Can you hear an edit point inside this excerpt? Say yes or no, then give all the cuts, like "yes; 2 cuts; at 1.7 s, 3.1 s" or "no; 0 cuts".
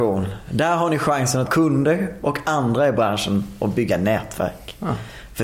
yes; 1 cut; at 1.5 s